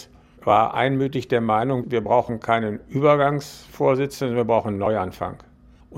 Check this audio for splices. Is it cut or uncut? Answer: uncut